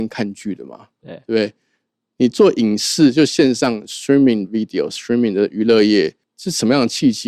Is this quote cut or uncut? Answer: cut